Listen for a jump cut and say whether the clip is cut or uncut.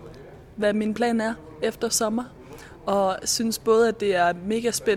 uncut